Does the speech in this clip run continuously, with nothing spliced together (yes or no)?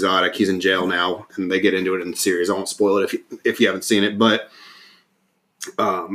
yes